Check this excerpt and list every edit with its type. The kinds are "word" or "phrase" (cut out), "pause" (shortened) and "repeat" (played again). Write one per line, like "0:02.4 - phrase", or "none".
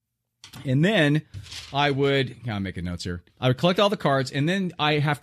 0:03.3 - pause